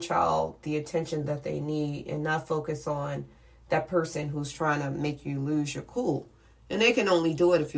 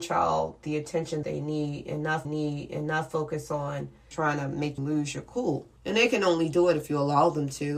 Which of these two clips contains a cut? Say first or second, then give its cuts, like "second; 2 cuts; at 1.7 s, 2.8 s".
second; 5 cuts; at 1.2 s, 2.2 s, 4.1 s, 4.8 s, 5.8 s